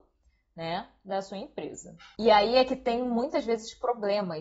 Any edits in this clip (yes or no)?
no